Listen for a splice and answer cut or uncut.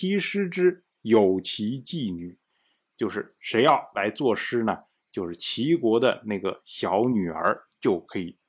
uncut